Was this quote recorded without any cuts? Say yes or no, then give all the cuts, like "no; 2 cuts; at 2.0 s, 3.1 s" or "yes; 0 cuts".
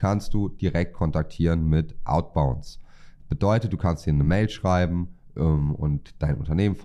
yes; 0 cuts